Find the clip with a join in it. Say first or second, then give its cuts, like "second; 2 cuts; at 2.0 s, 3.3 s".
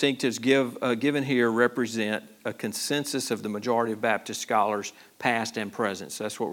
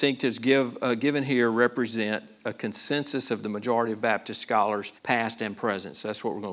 second; 1 cut; at 5.0 s